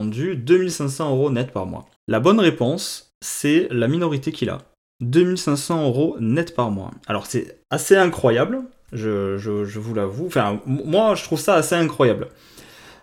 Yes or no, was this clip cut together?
yes